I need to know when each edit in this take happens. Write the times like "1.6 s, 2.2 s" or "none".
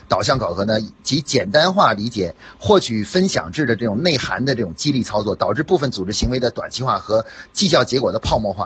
none